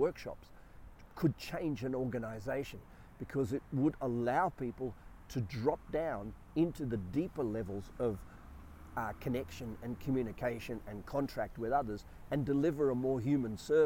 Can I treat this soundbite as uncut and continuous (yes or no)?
yes